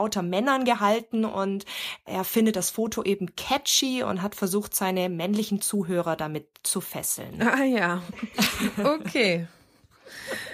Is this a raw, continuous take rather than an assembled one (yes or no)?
yes